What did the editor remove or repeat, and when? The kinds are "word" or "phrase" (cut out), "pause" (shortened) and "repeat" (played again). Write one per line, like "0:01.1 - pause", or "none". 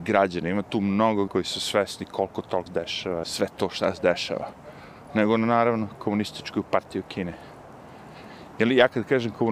0:01.3 - word
0:02.7 - word
0:03.2 - word